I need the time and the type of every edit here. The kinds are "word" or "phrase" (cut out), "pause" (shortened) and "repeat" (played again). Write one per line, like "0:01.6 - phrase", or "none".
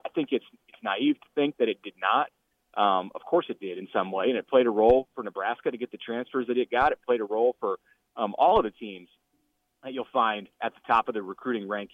0:10.5 - pause